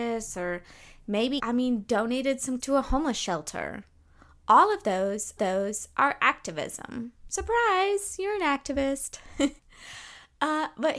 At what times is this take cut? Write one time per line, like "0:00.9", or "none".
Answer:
0:01.4
0:02.6
0:05.4
0:09.6